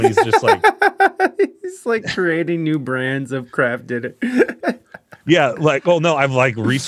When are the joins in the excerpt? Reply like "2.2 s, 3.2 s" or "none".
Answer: none